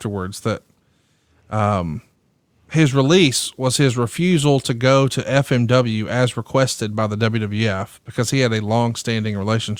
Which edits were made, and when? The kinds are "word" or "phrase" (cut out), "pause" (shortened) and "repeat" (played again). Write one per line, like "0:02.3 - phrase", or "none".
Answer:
none